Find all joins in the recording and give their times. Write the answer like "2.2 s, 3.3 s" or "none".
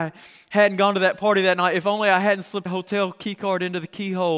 2.7 s